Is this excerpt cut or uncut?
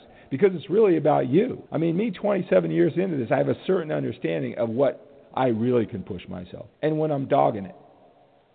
cut